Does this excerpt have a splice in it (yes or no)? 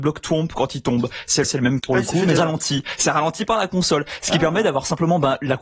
yes